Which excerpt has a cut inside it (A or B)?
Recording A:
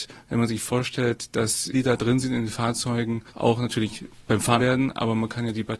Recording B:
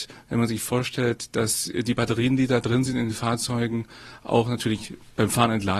A